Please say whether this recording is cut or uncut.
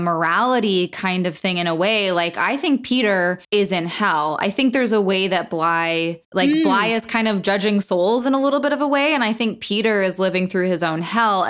cut